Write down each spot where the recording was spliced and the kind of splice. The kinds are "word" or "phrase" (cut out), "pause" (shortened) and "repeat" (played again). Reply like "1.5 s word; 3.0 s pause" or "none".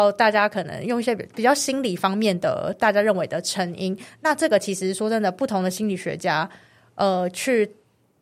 none

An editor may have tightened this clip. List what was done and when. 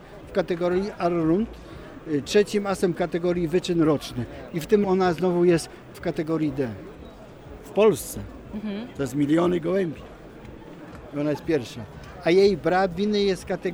2.9 s word; 4.8 s word; 5.9 s word

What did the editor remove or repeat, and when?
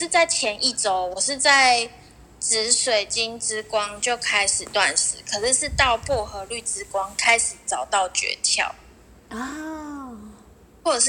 none

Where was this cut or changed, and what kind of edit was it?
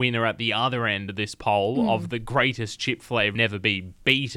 3.3 s phrase

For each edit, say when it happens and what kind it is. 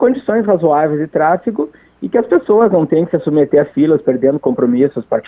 none

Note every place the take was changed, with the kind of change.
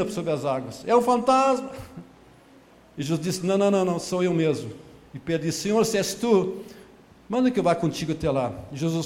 none

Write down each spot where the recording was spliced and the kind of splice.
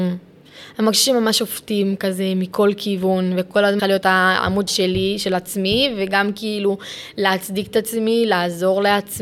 3.8 s phrase; 4.7 s word

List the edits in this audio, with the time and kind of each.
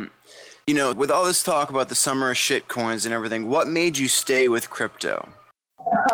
0.9 s word

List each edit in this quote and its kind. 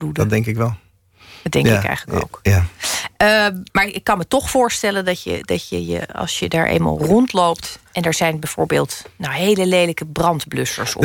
3.7 s pause; 7.9 s pause

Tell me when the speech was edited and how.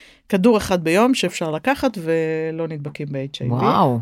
none

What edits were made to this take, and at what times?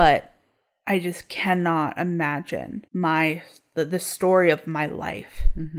2.9 s pause

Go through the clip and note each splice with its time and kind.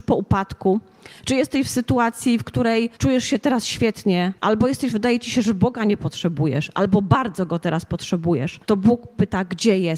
3.0 s pause; 4.4 s pause; 4.9 s phrase; 8.6 s pause

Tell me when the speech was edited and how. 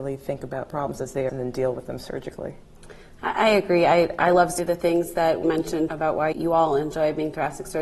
1.3 s word; 4.6 s word; 5.4 s word; 5.9 s word; 6.3 s word

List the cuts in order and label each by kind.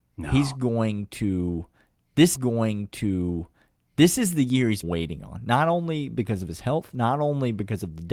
2.3 s repeat; 4.8 s word

